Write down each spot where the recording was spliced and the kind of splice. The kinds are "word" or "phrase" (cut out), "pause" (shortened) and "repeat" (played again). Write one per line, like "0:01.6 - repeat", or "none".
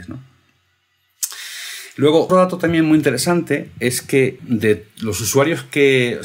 0:02.3 - word
0:04.4 - word